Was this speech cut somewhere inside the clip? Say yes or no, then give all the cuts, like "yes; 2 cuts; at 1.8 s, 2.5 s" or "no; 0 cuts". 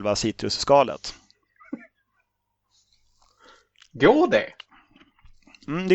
no; 0 cuts